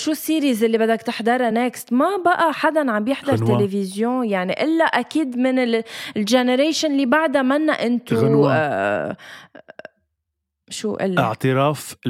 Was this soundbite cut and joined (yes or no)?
no